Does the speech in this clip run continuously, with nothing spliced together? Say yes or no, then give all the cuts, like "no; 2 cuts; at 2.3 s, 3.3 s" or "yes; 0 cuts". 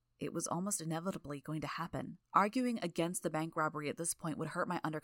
no; 1 cut; at 2.2 s